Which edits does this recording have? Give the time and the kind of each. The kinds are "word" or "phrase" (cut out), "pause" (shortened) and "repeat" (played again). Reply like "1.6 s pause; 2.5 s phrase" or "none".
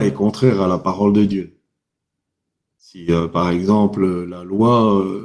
2.0 s pause